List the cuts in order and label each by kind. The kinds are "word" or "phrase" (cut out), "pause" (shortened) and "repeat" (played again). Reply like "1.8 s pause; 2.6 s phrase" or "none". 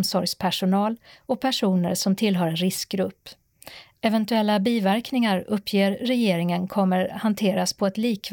none